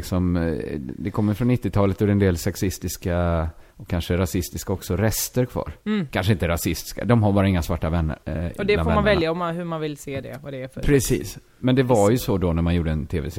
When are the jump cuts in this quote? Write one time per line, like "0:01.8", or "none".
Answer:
0:03.7
0:05.8
0:08.2